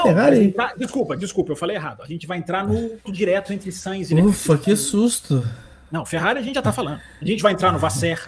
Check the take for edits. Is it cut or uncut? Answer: cut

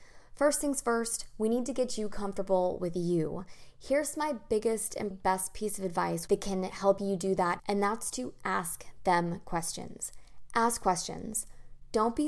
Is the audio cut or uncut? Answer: cut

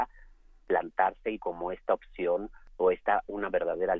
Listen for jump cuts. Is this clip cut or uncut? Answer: cut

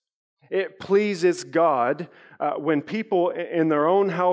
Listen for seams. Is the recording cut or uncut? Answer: uncut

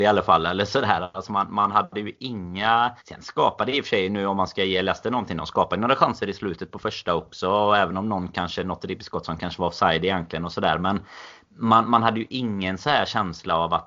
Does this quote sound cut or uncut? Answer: cut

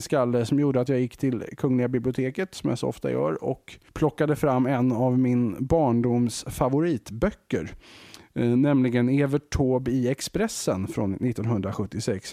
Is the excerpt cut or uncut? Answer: cut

